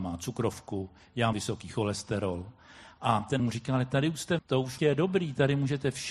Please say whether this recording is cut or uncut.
cut